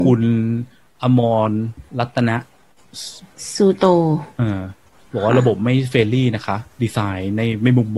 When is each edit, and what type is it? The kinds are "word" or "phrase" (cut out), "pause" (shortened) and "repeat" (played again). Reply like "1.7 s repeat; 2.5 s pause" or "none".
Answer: 1.9 s pause; 6.7 s pause